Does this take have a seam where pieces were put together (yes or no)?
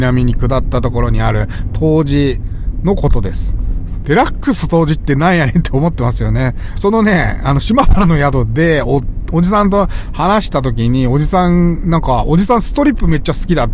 no